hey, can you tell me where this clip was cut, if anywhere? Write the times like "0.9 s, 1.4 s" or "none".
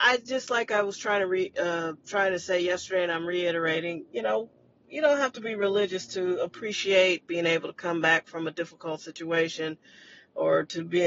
none